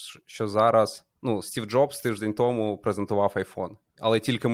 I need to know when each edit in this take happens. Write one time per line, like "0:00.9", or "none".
none